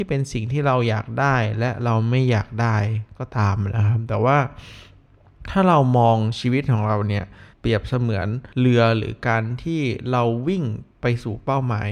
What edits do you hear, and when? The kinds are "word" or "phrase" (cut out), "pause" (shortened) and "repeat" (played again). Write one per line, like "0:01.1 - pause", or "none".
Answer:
0:07.5 - pause
0:08.5 - pause
0:10.9 - pause